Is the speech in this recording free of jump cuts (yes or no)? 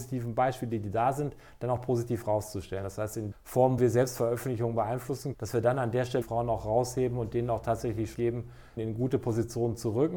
no